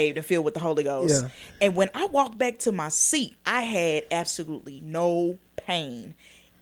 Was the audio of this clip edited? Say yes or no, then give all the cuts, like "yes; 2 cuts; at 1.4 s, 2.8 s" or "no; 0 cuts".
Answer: yes; 1 cut; at 3.4 s